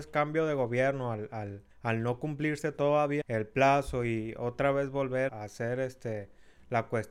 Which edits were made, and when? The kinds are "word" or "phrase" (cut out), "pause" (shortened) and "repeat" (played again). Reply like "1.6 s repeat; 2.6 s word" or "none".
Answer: 1.7 s pause; 3.2 s word; 5.3 s word